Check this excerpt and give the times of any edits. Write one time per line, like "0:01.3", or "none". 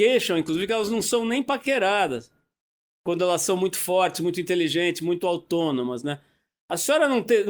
none

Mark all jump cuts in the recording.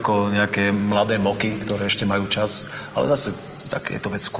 none

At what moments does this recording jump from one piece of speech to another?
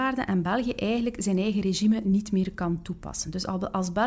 none

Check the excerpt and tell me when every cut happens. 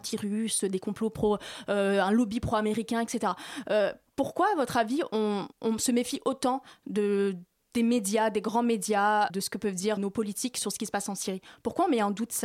0:05.5
0:09.3
0:10.0

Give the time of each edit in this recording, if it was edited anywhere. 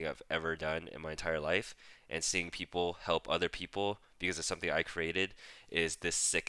none

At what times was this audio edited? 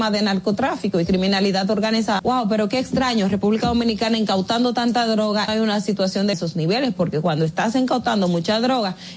0:02.2
0:05.5
0:06.3

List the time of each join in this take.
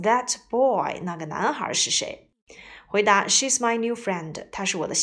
none

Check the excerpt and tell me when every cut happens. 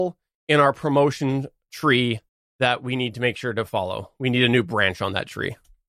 0:02.3

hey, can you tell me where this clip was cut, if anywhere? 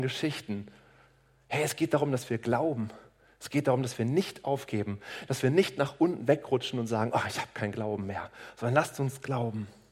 none

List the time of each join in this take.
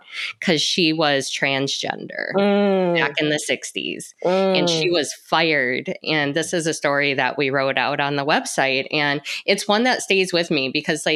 none

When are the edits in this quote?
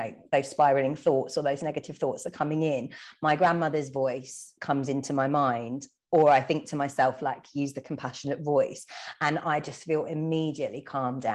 none

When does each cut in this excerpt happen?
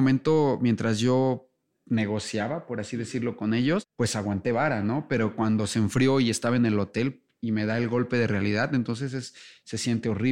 none

